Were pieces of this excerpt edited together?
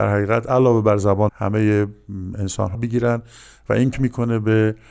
yes; 3 cuts; at 1.3 s, 2.7 s, 3.9 s

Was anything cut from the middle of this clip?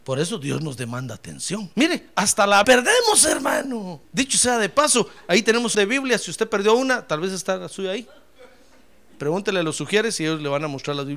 yes; 4 cuts; at 1.7 s, 2.6 s, 4.0 s, 5.7 s

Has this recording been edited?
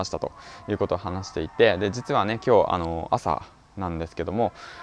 no; 0 cuts

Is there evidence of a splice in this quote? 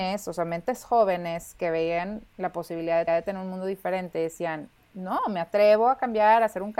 yes; 1 cut; at 3.1 s

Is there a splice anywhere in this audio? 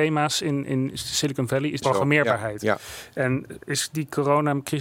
yes; 2 cuts; at 1.8 s, 3.6 s

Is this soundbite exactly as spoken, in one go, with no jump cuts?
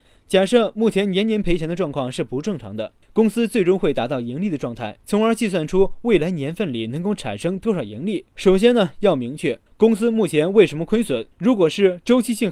no; 5 cuts; at 3.0 s, 5.0 s, 8.3 s, 9.7 s, 11.3 s

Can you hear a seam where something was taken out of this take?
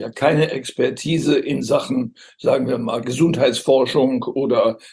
no; 0 cuts

